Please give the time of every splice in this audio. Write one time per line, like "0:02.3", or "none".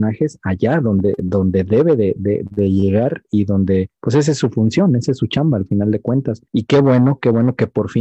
0:03.9
0:06.5